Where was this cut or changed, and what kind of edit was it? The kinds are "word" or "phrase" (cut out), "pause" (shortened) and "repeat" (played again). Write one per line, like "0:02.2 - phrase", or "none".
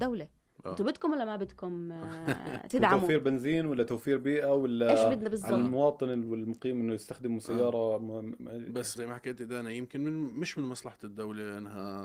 0:09.0 - word